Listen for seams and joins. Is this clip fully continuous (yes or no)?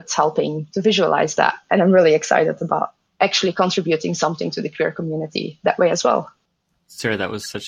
no